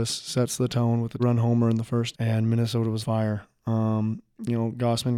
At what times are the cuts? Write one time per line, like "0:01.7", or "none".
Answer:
0:01.2
0:02.1
0:03.0